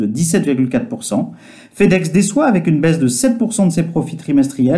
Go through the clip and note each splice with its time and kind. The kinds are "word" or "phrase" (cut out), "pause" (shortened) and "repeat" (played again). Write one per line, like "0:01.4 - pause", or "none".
none